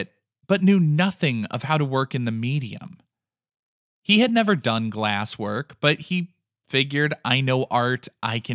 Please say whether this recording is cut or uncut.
uncut